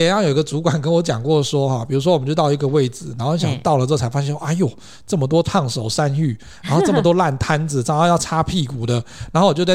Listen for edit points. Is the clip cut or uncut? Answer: uncut